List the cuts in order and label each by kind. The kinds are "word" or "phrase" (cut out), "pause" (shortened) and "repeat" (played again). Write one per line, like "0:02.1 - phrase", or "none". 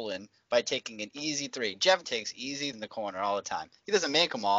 0:02.0 - word
0:02.7 - word